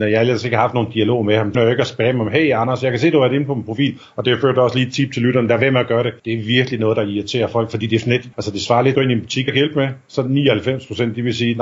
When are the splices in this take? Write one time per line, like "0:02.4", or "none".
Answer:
0:01.5
0:06.2
0:08.3
0:08.9
0:09.5